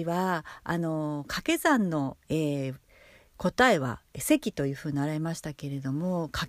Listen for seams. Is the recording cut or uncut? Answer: uncut